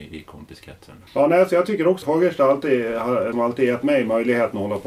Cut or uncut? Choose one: cut